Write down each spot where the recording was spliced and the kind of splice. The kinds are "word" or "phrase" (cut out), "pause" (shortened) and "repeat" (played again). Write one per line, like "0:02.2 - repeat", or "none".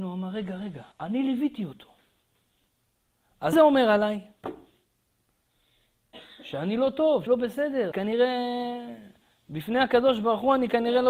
0:00.9 - pause
0:03.5 - word
0:07.3 - word
0:07.9 - word